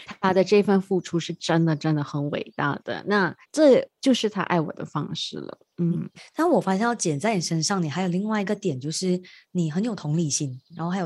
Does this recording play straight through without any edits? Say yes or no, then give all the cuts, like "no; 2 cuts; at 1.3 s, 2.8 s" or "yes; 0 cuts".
yes; 0 cuts